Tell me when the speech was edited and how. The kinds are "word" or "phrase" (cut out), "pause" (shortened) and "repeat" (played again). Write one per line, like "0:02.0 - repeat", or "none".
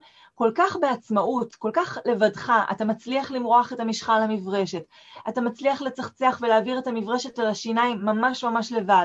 none